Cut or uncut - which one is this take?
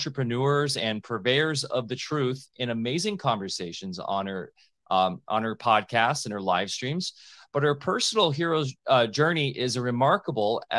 uncut